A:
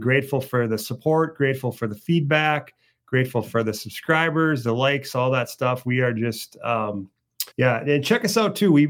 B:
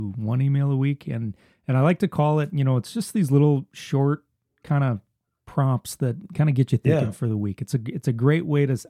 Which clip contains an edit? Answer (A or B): A